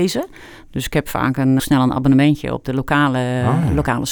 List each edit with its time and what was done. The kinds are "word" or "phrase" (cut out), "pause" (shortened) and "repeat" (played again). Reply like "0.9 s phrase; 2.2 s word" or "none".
1.6 s word